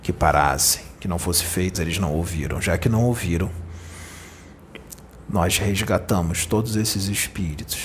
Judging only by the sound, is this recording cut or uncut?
cut